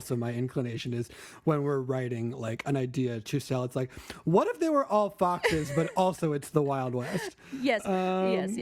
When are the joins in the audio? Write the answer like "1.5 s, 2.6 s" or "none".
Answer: none